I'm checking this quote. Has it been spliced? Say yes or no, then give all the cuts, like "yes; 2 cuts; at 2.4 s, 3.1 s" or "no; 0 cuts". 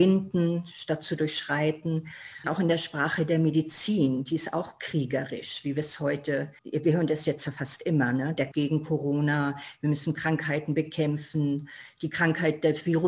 yes; 3 cuts; at 2.4 s, 6.6 s, 8.5 s